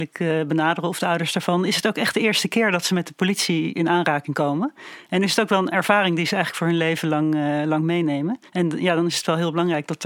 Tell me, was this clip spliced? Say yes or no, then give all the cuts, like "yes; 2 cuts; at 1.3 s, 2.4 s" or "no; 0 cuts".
no; 0 cuts